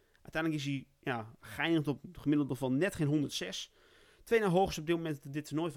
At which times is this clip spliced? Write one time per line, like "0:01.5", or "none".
none